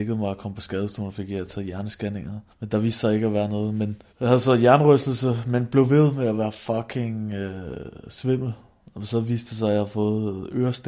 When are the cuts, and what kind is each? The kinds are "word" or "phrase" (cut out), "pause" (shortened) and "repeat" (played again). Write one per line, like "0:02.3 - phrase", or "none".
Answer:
0:02.5 - pause
0:04.1 - pause